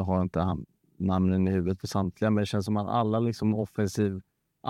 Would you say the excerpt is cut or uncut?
uncut